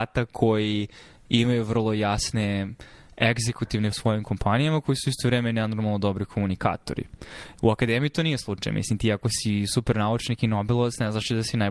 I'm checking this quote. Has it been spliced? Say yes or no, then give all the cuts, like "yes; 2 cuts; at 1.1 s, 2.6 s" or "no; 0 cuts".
yes; 1 cut; at 3.9 s